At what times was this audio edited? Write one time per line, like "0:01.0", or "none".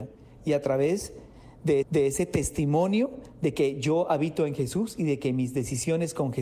0:01.8

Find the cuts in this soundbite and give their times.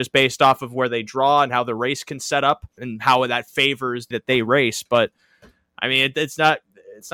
0:02.8
0:04.1

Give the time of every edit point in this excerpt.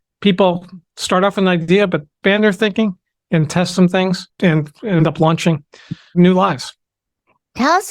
0:04.3

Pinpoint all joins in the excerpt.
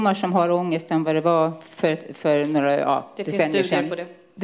none

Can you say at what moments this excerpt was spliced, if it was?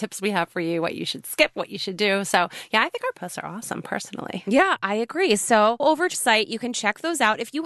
0:05.8
0:06.1

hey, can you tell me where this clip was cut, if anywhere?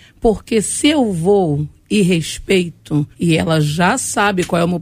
0:03.1

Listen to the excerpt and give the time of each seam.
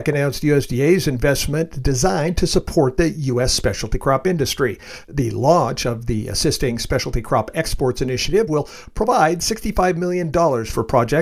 none

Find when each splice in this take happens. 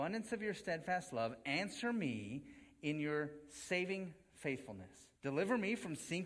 0:05.2

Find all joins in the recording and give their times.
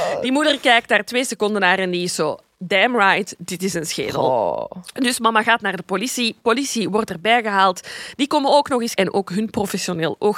0:09.0

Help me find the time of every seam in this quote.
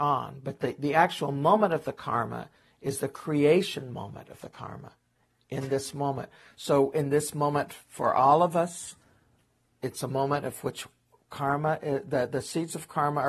none

